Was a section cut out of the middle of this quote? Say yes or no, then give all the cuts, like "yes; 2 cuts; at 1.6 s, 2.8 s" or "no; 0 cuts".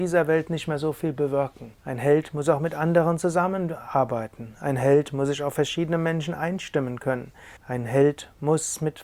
yes; 2 cuts; at 1.8 s, 7.6 s